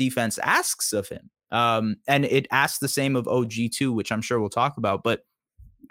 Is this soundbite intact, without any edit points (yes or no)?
yes